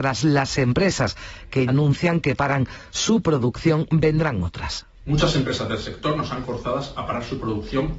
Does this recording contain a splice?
yes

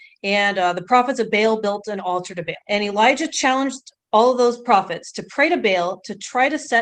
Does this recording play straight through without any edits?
no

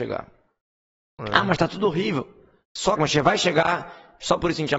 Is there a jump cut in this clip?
yes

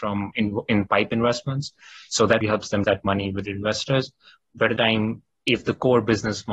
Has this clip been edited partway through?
yes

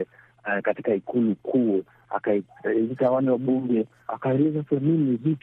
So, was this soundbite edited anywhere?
no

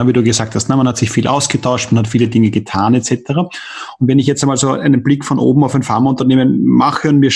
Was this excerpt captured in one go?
yes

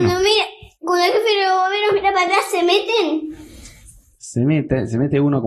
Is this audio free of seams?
yes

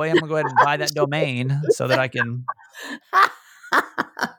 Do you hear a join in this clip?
no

